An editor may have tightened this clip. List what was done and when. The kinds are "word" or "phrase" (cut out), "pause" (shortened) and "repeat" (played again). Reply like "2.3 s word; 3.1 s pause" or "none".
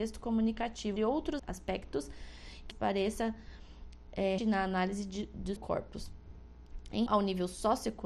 1.0 s word; 1.4 s word; 2.7 s word; 4.4 s word; 5.6 s word; 7.1 s word